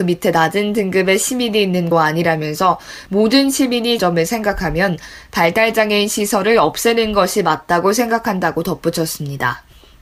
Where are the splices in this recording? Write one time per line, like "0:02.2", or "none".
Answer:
0:01.9
0:04.0